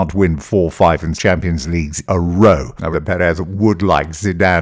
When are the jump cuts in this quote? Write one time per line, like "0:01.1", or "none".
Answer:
0:01.2
0:02.0
0:02.9